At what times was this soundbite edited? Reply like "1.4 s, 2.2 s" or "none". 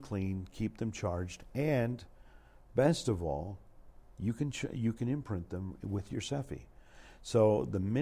none

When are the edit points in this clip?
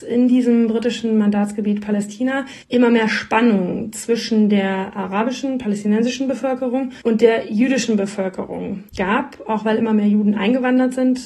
2.6 s, 7.0 s, 8.9 s

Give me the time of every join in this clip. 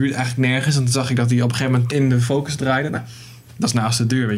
1.9 s, 2.9 s

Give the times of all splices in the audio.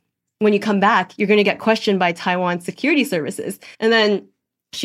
3.7 s

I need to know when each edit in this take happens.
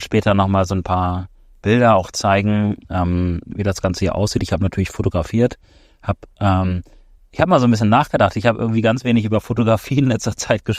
none

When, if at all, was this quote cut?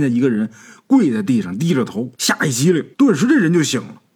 2.1 s, 2.9 s

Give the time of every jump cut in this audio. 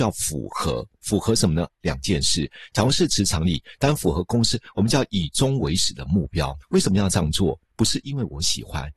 6.6 s

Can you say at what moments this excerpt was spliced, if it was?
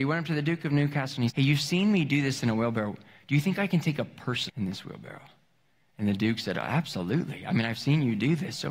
1.3 s, 4.5 s

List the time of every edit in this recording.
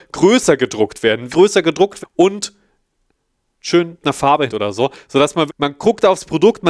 1.3 s, 2.0 s, 4.0 s, 4.5 s, 5.5 s

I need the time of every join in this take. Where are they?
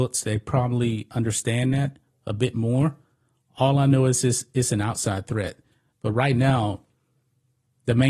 none

